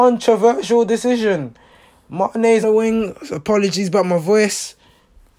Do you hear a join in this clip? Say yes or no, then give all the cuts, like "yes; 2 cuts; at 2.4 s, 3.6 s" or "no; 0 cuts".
yes; 1 cut; at 2.6 s